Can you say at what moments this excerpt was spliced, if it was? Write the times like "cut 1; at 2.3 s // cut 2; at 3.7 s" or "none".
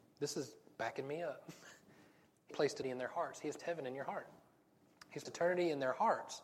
cut 1; at 2.5 s // cut 2; at 2.8 s // cut 3; at 3.6 s // cut 4; at 5.3 s